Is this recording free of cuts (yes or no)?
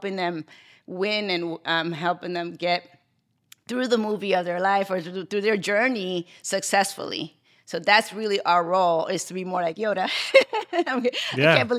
yes